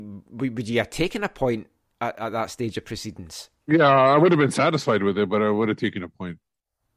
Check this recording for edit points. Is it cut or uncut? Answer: cut